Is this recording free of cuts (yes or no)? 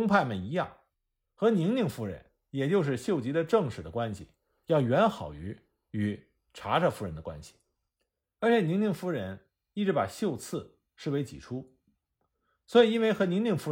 yes